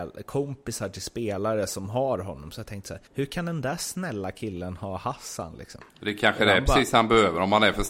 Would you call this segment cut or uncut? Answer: cut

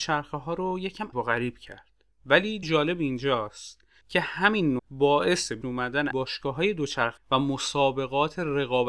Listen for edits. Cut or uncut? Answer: cut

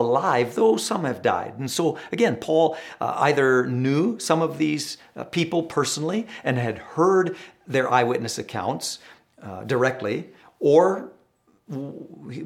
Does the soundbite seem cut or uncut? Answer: uncut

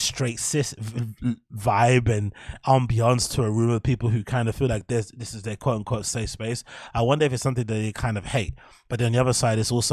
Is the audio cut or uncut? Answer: uncut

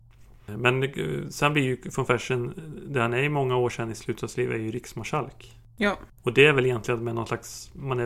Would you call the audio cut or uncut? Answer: cut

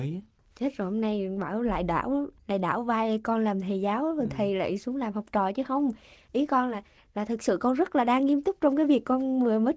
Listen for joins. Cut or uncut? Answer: uncut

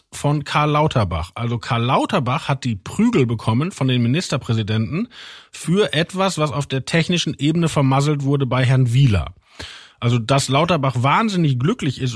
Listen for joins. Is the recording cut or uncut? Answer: uncut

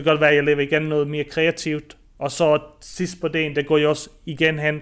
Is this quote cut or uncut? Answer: uncut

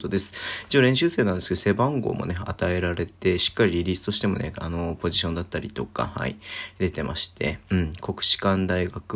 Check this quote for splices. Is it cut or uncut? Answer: uncut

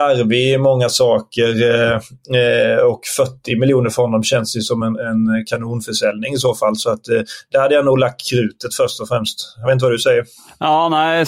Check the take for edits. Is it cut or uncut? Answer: uncut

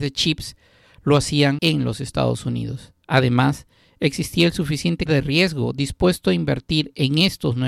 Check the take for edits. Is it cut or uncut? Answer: cut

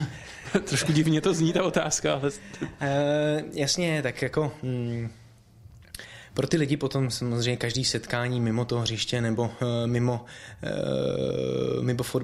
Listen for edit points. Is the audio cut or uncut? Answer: uncut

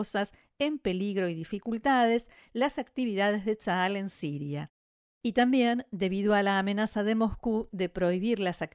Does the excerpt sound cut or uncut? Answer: uncut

